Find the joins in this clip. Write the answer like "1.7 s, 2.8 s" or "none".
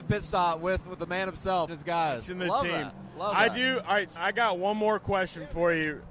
1.7 s, 4.2 s